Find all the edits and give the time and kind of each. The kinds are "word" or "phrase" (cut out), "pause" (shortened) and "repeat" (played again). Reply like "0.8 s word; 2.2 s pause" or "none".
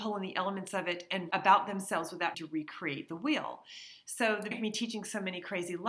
1.3 s word; 2.3 s word; 4.5 s word